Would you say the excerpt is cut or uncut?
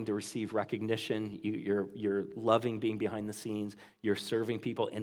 uncut